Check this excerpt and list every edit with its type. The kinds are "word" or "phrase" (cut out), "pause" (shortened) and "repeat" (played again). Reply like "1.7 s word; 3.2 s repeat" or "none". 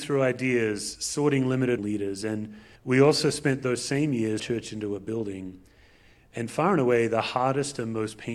1.8 s phrase; 2.8 s pause; 4.4 s phrase